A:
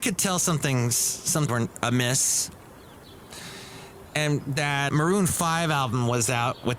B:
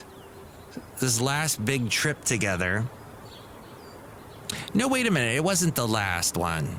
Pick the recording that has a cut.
A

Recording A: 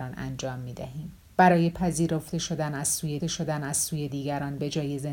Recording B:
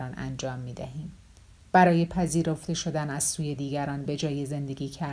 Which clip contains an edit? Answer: A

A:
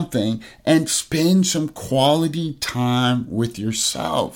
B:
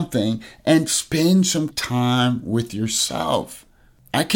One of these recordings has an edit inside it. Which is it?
B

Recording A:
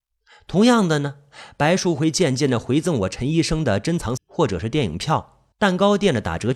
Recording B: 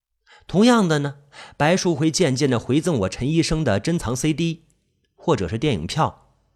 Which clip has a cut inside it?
A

